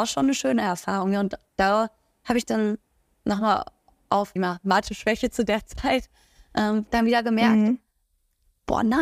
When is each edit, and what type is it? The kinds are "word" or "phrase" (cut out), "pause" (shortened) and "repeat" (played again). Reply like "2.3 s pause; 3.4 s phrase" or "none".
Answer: 4.4 s phrase